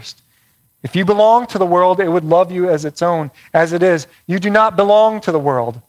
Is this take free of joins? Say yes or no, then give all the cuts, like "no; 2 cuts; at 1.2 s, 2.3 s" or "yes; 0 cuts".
yes; 0 cuts